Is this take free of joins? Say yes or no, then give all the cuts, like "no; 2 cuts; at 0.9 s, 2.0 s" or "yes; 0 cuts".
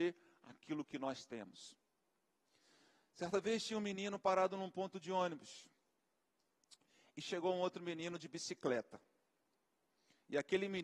yes; 0 cuts